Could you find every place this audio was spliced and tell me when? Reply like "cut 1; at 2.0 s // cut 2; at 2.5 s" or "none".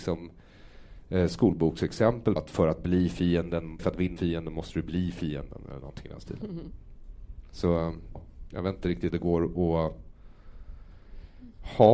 cut 1; at 2.4 s // cut 2; at 3.8 s // cut 3; at 4.2 s // cut 4; at 8.2 s // cut 5; at 9.1 s